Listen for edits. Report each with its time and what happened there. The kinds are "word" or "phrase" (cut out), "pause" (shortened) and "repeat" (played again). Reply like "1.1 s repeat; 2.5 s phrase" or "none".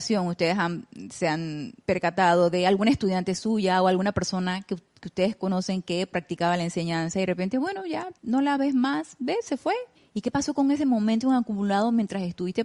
1.8 s pause; 8.2 s pause; 9.9 s pause